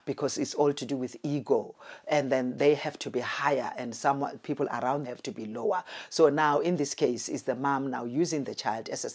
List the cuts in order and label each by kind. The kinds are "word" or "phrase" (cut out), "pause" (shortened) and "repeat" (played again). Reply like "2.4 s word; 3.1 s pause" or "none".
5.0 s word